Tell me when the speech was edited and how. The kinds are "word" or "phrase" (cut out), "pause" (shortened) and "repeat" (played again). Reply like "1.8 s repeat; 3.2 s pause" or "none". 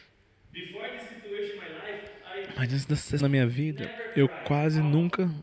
3.2 s word